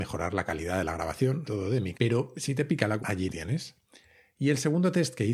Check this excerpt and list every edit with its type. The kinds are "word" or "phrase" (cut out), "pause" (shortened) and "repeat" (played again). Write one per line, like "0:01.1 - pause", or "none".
0:01.5 - word
0:01.9 - word
0:03.0 - word
0:03.3 - word